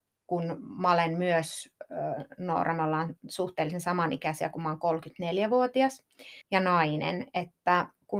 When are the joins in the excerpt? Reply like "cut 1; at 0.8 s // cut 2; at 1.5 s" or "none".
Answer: cut 1; at 6.4 s